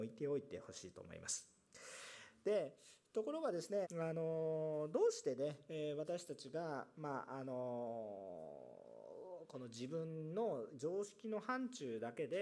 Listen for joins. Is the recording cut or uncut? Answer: cut